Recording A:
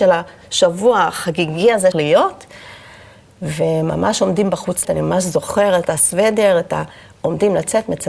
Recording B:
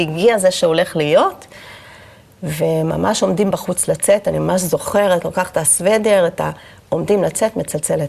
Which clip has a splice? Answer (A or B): A